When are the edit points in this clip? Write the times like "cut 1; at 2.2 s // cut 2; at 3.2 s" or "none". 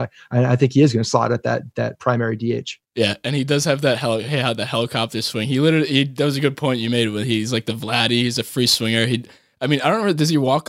cut 1; at 2.8 s